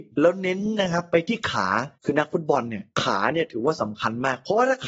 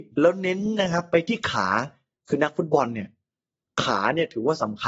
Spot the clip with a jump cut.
first; 2 cuts; at 1.9 s, 2.9 s

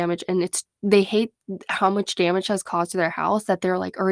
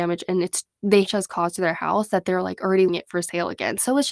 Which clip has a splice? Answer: second; 2 cuts; at 1.1 s, 2.9 s

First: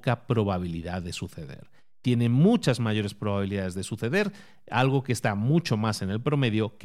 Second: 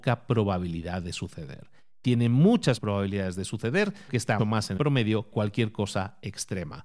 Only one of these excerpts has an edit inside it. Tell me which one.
second; 5 cuts; at 2.8 s, 4.1 s, 4.4 s, 4.8 s, 5.3 s

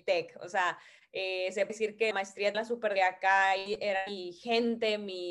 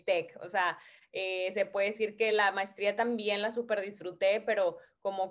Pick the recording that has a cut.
first; 4 cuts; at 1.7 s, 2.1 s, 2.5 s, 3.0 s

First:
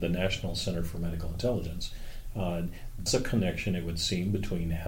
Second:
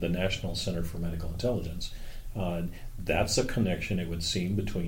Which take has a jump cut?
first; 1 cut; at 3.1 s

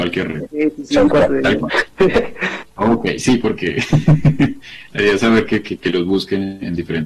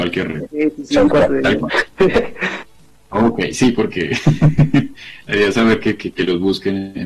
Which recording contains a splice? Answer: first; 1 cut; at 2.7 s

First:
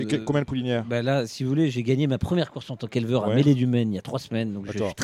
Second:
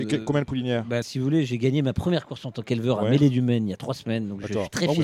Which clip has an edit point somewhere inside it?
second; 1 cut; at 1.0 s

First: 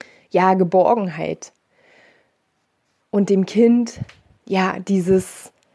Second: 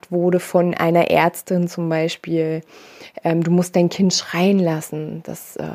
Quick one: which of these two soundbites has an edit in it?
first; 1 cut; at 4.3 s

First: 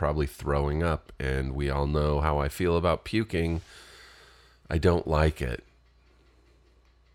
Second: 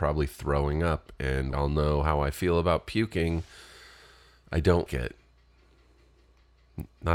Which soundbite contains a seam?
second; 2 cuts; at 1.5 s, 4.9 s

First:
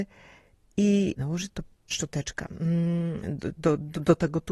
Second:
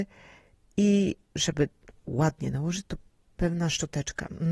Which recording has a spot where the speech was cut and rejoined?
first; 3 cuts; at 1.2 s, 1.9 s, 3.2 s

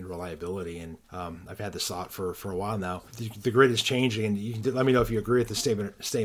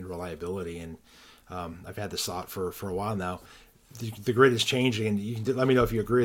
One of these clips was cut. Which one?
first; 2 cuts; at 1.0 s, 3.1 s

